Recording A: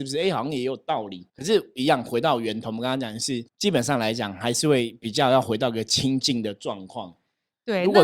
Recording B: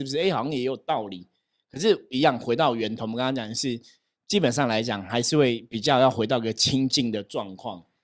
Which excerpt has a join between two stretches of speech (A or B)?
A